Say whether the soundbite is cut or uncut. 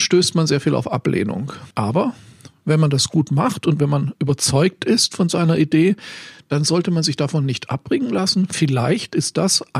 cut